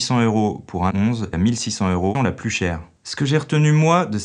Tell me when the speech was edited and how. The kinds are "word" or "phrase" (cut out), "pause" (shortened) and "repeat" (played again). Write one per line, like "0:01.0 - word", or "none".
0:00.9 - word
0:01.3 - phrase
0:02.1 - phrase